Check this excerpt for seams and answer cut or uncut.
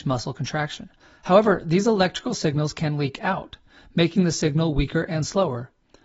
cut